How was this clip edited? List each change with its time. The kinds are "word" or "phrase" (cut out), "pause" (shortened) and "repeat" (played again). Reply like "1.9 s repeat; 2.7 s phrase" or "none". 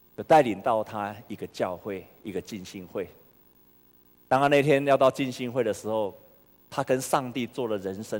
none

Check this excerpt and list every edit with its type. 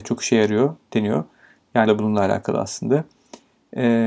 1.9 s word

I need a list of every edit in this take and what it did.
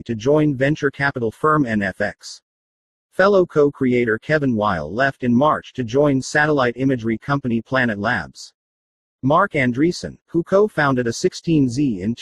none

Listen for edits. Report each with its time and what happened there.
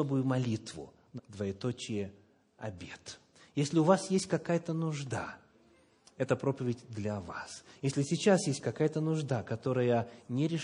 1.2 s word

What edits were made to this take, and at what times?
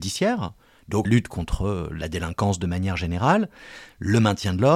1.0 s word

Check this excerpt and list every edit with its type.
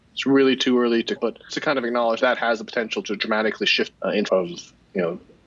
1.2 s word; 1.5 s word; 2.2 s word; 3.0 s word; 3.9 s word; 4.3 s word

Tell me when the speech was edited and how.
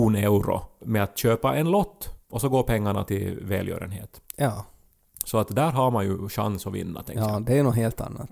2.2 s pause; 3.1 s word

